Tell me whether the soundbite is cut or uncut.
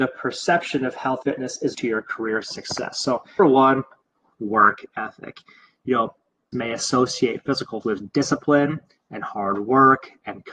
cut